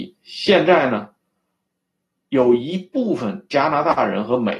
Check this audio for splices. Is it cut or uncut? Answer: uncut